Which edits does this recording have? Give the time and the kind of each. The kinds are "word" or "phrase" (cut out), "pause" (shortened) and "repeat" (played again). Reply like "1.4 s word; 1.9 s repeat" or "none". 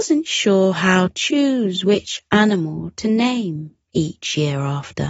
1.1 s word